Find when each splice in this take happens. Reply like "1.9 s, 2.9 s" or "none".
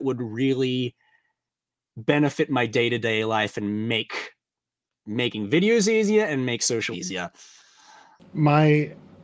6.9 s

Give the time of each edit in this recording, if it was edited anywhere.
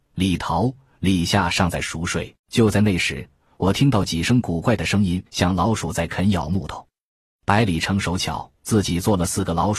2.4 s, 5.3 s, 8.6 s

